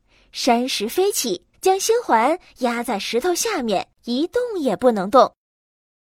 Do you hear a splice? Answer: yes; 2 cuts; at 1.5 s, 3.9 s

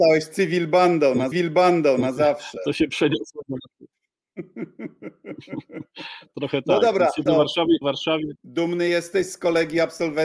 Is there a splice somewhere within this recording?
yes; 4 cuts; at 1.3 s, 7.3 s, 7.8 s, 8.4 s

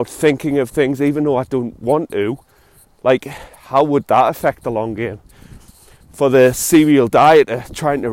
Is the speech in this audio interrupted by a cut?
no; 0 cuts

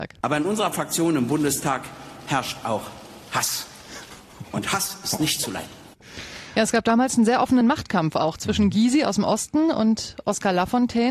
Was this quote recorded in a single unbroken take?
yes; 0 cuts

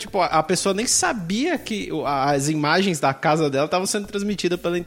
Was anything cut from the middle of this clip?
no; 0 cuts

